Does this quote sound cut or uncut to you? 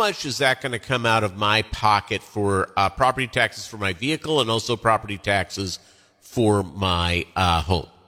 uncut